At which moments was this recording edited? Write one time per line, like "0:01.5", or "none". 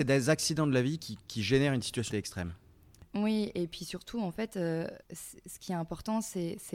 0:02.1
0:05.0